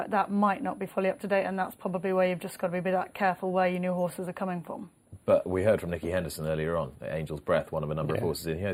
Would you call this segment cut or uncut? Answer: uncut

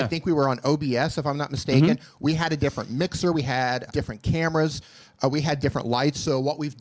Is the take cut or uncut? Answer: cut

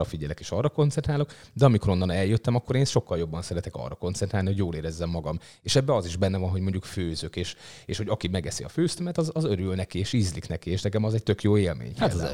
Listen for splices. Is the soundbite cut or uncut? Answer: uncut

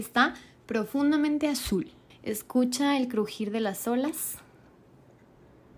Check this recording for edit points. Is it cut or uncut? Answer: cut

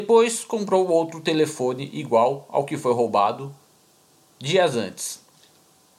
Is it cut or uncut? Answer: uncut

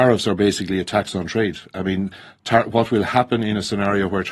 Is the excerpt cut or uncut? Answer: uncut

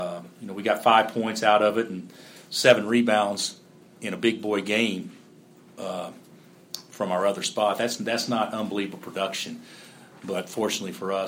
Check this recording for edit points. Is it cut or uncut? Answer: uncut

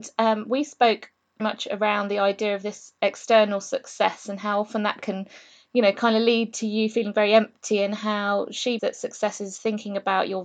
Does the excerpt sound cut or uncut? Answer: cut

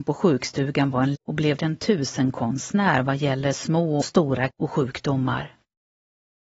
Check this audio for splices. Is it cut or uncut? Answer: cut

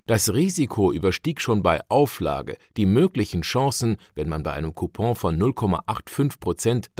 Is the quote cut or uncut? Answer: uncut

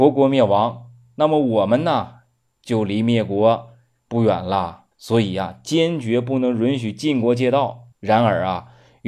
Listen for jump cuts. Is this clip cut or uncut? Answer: cut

